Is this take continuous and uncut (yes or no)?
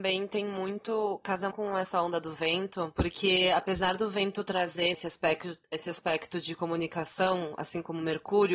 no